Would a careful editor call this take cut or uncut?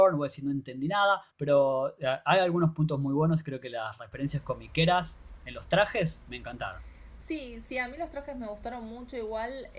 cut